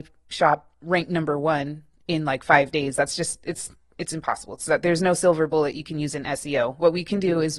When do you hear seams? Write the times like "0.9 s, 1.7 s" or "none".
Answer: none